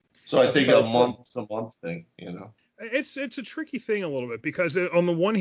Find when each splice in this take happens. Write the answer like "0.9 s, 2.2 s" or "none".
2.6 s